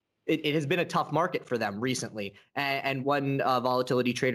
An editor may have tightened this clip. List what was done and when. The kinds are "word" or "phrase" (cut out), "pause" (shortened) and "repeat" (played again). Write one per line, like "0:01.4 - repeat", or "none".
0:03.0 - word